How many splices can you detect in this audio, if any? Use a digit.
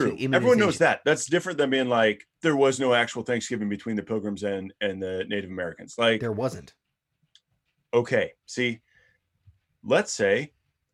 0